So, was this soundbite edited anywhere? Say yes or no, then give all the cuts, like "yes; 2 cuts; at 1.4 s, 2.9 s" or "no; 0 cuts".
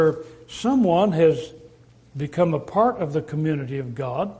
no; 0 cuts